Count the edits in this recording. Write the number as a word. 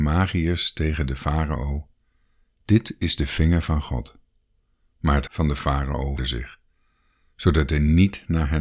two